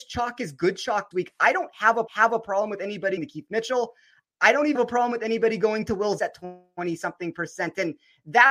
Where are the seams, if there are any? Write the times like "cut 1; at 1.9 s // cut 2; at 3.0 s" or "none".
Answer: cut 1; at 1.1 s // cut 2; at 2.1 s // cut 3; at 3.2 s // cut 4; at 4.8 s // cut 5; at 6.2 s